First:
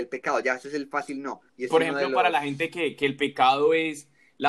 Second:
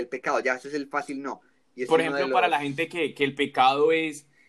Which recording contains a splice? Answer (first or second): first